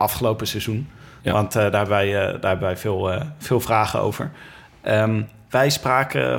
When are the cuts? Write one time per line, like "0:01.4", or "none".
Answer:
none